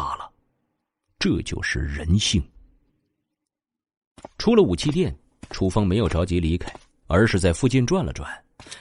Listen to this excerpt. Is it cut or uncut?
uncut